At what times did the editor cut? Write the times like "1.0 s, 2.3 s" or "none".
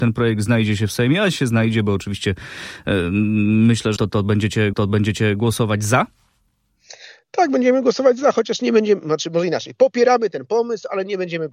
4.0 s, 4.7 s